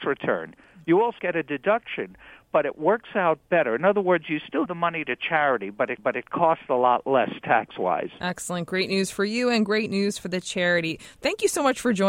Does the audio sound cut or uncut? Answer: cut